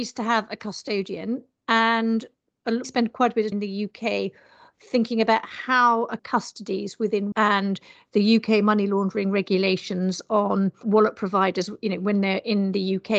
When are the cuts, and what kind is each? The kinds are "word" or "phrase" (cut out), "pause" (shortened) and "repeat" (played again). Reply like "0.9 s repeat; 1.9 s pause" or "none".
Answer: 2.8 s word; 3.5 s word; 6.2 s word; 7.3 s word; 10.8 s word